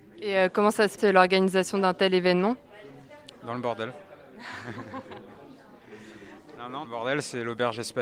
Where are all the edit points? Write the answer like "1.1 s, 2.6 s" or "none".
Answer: 1.0 s, 6.8 s